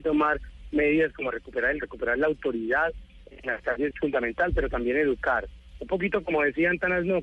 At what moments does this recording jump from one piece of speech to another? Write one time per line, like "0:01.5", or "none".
0:01.8
0:03.9